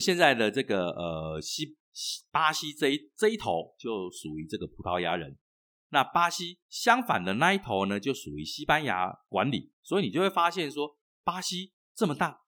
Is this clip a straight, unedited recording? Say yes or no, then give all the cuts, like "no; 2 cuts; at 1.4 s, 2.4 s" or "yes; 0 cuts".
yes; 0 cuts